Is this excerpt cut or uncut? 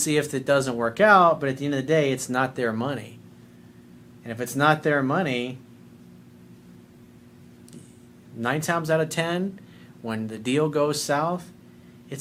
uncut